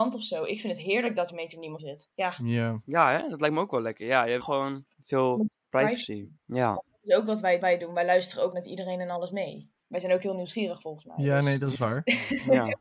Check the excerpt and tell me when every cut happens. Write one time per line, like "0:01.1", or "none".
0:01.3
0:01.8
0:02.1
0:04.4
0:04.9
0:06.4
0:07.6
0:08.5